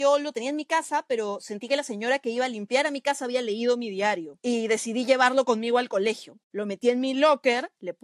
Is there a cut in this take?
no; 0 cuts

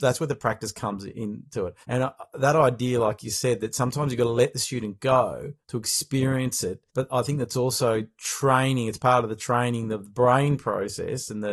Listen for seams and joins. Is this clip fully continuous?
no; 3 cuts; at 1.8 s, 5.6 s, 6.9 s

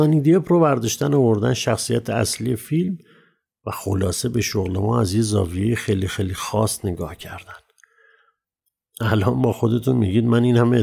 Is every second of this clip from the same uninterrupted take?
yes; 0 cuts

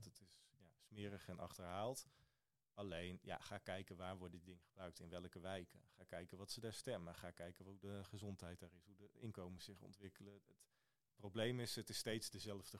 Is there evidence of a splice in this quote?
no; 0 cuts

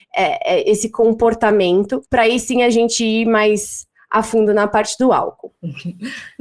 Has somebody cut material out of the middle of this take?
yes; 1 cut; at 2.1 s

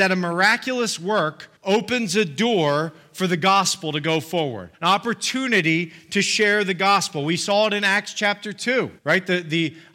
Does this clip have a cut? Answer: yes; 3 cuts; at 1.6 s, 4.7 s, 9.0 s

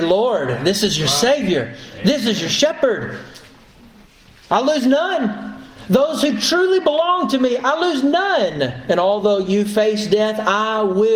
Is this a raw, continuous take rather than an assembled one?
yes; 0 cuts

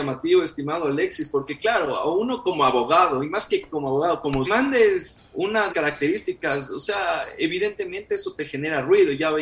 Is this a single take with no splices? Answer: no; 2 cuts; at 4.4 s, 5.7 s

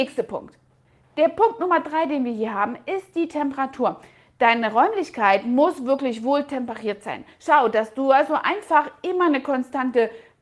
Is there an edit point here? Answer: no; 0 cuts

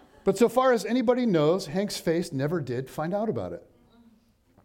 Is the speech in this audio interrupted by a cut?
no; 0 cuts

